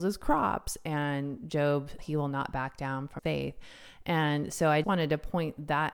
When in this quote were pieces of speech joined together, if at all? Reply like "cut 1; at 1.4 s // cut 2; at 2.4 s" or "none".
cut 1; at 2.0 s // cut 2; at 3.2 s // cut 3; at 4.8 s